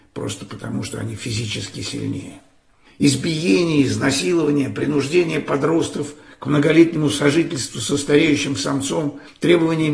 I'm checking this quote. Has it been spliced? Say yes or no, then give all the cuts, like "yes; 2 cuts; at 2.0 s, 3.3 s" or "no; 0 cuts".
no; 0 cuts